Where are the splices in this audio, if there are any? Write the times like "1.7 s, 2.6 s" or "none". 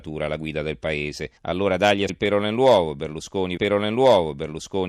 1.4 s, 2.1 s, 3.6 s